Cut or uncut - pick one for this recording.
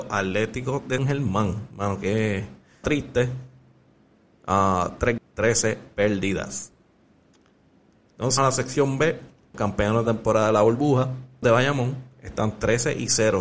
cut